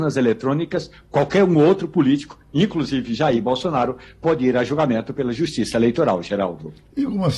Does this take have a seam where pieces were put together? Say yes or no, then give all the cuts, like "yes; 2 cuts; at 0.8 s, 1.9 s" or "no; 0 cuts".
no; 0 cuts